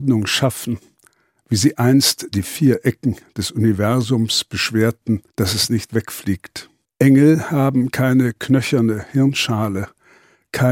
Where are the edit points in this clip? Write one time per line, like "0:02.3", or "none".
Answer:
0:05.3
0:06.8